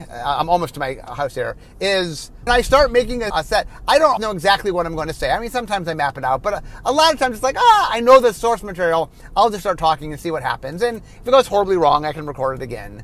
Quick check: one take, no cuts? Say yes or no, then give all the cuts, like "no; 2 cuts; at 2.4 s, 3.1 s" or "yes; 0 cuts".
no; 3 cuts; at 2.5 s, 3.3 s, 4.2 s